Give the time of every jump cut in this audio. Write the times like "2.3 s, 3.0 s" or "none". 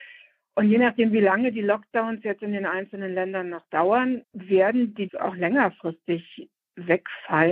4.2 s, 5.1 s